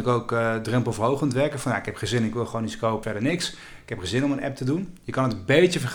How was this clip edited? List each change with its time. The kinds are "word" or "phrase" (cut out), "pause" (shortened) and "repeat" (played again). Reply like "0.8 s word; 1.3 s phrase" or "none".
3.0 s word